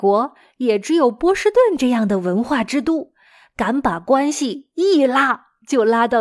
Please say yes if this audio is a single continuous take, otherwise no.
yes